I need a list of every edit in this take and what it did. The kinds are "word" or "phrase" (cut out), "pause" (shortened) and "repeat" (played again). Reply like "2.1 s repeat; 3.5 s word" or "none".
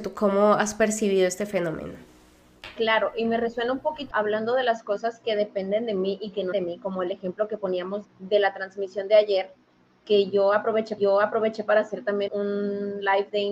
4.1 s word; 6.5 s word; 8.0 s word; 11.0 s repeat; 12.3 s word